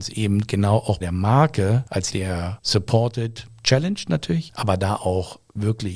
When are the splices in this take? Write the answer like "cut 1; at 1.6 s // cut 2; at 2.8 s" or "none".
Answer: cut 1; at 1.0 s // cut 2; at 2.1 s